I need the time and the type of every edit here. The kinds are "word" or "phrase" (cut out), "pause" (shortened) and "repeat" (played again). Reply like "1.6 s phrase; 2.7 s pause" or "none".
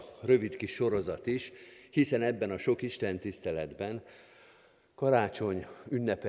none